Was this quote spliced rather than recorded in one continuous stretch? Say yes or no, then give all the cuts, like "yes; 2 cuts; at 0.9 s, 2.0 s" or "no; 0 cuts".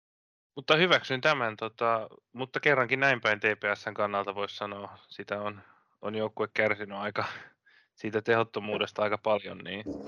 no; 0 cuts